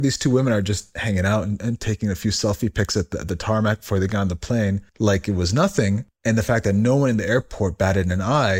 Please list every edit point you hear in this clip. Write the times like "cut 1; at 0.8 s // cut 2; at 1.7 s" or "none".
none